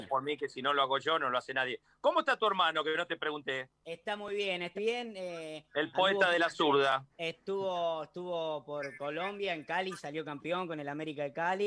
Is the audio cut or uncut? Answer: cut